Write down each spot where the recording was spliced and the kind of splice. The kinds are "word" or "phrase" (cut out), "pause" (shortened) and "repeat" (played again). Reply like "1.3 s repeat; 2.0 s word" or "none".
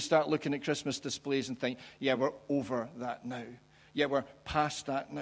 none